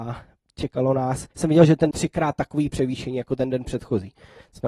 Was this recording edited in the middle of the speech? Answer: yes; 2 cuts; at 1.3 s, 1.9 s

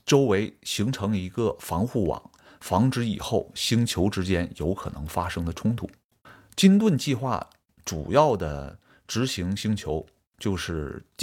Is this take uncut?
yes; 0 cuts

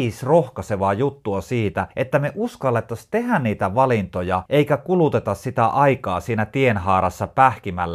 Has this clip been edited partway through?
yes; 2 cuts; at 1.9 s, 4.5 s

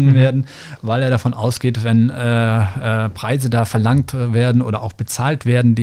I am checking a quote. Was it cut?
no; 0 cuts

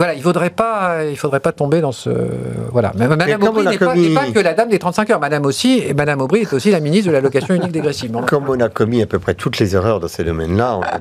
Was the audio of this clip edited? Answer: no; 0 cuts

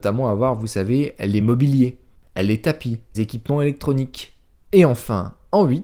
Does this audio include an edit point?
yes; 2 cuts; at 1.4 s, 3.1 s

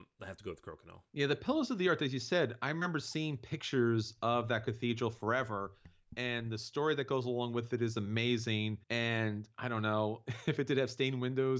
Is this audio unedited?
no; 2 cuts; at 1.1 s, 8.8 s

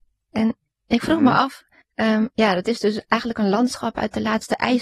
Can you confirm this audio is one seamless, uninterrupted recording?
no; 1 cut; at 1.8 s

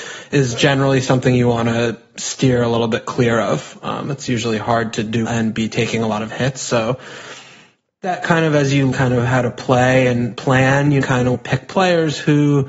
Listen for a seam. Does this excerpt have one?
yes; 4 cuts; at 5.2 s, 8.9 s, 11.0 s, 11.3 s

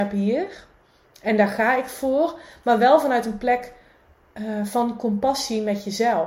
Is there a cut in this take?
no; 0 cuts

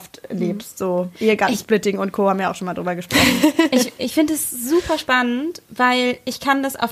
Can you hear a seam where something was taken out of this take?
yes; 1 cut; at 4.0 s

